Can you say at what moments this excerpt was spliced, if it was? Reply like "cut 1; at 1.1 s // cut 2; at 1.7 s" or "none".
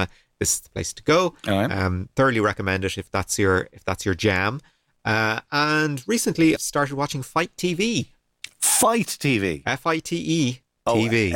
cut 1; at 6.6 s